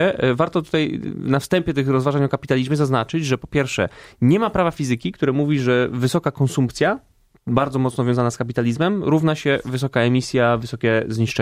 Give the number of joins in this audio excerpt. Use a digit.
0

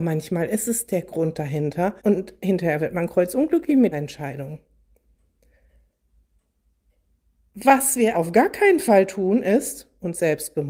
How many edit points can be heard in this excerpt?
3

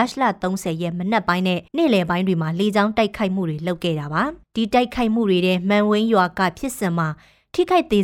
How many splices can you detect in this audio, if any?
2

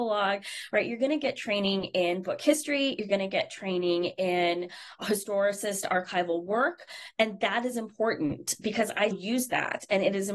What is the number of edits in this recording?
2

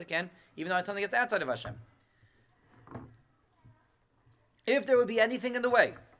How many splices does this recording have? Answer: 0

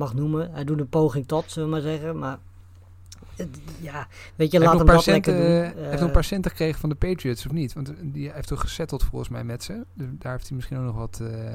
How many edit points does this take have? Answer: 0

